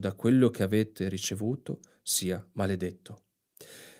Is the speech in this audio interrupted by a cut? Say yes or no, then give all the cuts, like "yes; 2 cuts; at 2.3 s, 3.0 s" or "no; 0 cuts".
no; 0 cuts